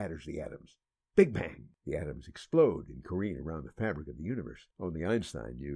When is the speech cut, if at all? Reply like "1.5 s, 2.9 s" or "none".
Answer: 4.7 s